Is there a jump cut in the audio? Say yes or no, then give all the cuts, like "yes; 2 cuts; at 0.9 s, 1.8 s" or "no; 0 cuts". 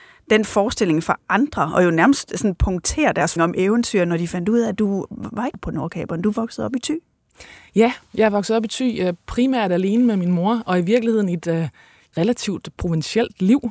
yes; 4 cuts; at 3.4 s, 5.5 s, 12.1 s, 12.8 s